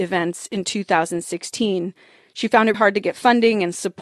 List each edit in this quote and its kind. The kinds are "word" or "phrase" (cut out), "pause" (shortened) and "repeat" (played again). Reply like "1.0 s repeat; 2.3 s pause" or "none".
2.7 s word